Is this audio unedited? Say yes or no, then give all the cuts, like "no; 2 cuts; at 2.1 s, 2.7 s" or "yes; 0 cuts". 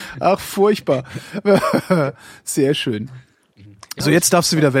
yes; 0 cuts